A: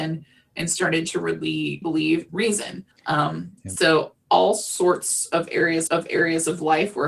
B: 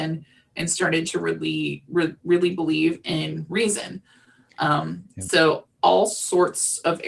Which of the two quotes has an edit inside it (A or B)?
A